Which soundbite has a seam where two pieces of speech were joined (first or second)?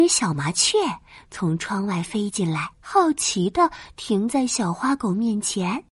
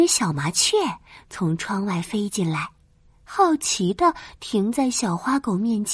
first